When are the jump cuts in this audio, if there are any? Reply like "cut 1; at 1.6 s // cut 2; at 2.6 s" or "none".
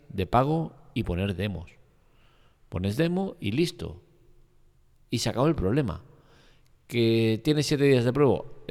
none

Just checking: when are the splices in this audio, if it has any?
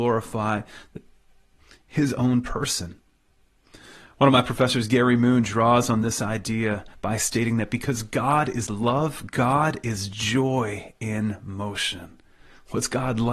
none

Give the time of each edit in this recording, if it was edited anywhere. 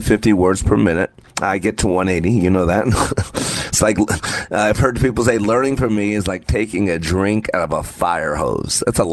none

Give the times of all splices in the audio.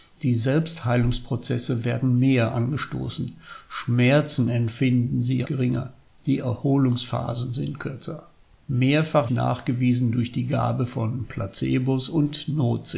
cut 1; at 5.4 s // cut 2; at 9.3 s

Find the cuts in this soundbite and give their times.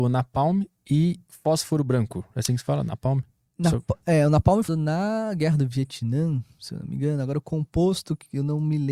cut 1; at 4.7 s

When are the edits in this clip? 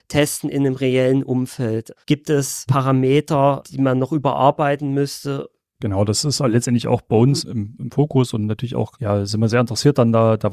cut 1; at 2.0 s // cut 2; at 8.9 s

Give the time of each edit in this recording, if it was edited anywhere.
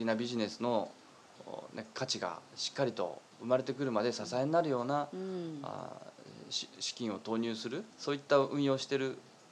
cut 1; at 7.9 s

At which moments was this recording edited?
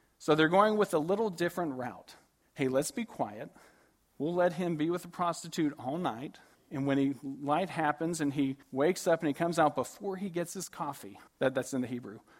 cut 1; at 2.4 s // cut 2; at 4.0 s // cut 3; at 6.5 s // cut 4; at 8.6 s // cut 5; at 11.3 s

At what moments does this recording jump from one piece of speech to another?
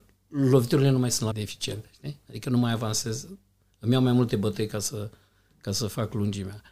cut 1; at 1.3 s

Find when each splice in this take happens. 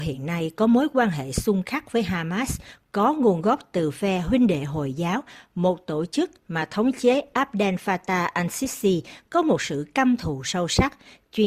none

